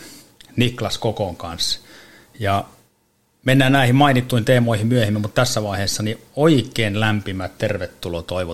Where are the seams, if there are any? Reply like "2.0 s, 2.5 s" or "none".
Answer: none